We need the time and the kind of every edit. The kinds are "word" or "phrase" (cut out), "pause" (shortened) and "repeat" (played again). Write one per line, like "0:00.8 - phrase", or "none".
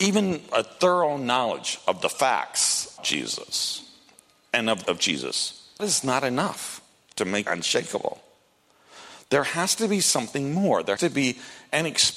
0:03.0 - word
0:04.8 - word
0:05.8 - word
0:07.5 - word
0:11.0 - word